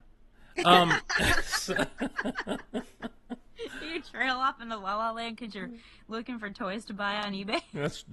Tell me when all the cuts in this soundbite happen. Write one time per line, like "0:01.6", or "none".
none